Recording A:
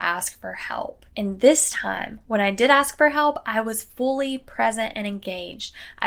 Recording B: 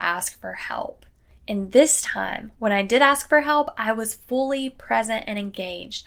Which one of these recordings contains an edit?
A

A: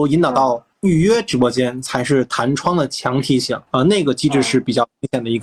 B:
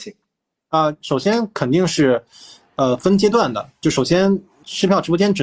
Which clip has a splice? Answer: A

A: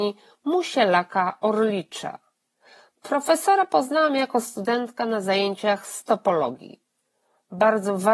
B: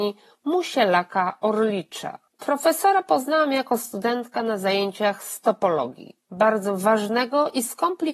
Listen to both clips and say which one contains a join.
B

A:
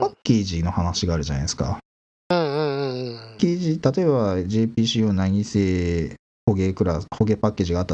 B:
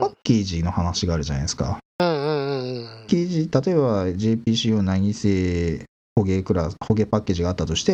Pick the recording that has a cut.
B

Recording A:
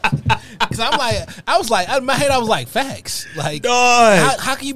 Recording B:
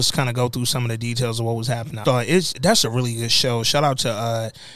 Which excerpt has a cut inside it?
B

